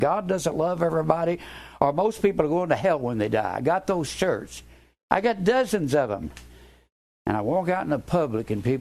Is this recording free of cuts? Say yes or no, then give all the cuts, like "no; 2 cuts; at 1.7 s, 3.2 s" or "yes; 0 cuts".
yes; 0 cuts